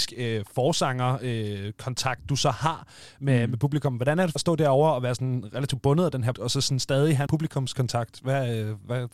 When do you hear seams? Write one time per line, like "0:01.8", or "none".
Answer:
0:04.4
0:06.3
0:07.3

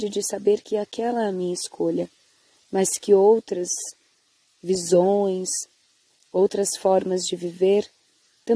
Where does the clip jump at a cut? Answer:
none

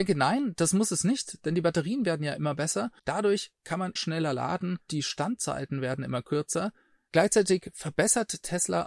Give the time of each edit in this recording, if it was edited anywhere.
0:03.0
0:04.0
0:04.9

